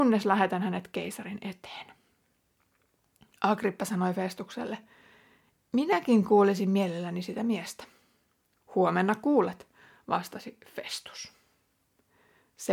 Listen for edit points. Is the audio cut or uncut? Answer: uncut